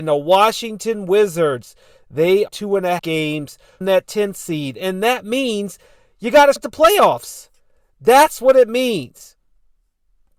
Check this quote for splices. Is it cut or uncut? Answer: cut